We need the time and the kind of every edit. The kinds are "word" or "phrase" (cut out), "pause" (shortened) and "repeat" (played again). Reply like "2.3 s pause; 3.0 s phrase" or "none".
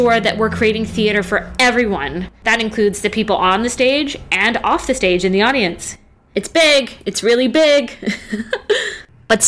none